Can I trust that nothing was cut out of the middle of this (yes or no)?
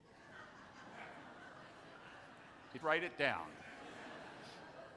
no